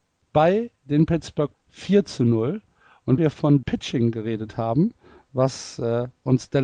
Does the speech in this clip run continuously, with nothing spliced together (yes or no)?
no